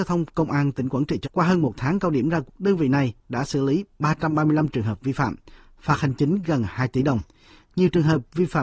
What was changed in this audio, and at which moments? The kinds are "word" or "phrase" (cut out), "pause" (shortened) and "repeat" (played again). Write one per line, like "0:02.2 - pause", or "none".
0:01.2 - word
0:02.5 - word